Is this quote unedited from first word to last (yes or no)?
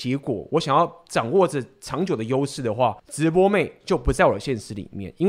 no